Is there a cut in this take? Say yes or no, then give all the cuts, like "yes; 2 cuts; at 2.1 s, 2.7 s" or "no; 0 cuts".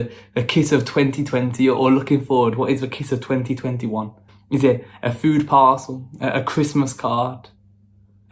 yes; 1 cut; at 4.3 s